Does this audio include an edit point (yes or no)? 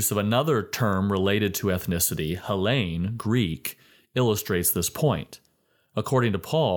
no